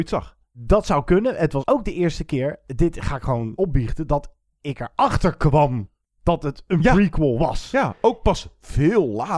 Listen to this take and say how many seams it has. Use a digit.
0